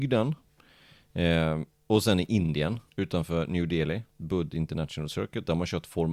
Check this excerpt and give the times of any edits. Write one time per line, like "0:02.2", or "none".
0:02.9
0:04.1